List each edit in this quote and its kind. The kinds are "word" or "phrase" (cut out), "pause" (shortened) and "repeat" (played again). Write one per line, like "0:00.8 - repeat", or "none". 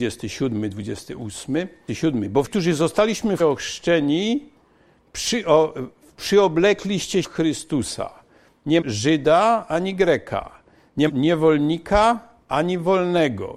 0:01.9 - word
0:02.4 - word
0:03.4 - word
0:07.2 - word
0:08.8 - word
0:11.1 - word